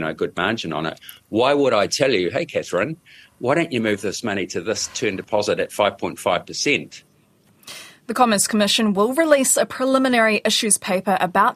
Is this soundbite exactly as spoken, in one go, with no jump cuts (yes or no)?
yes